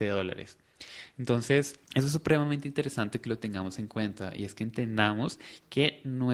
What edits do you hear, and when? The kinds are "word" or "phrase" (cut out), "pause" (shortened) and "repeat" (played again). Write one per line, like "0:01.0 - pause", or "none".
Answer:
0:01.8 - pause